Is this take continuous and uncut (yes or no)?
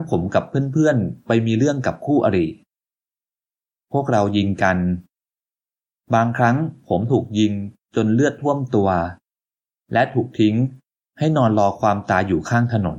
yes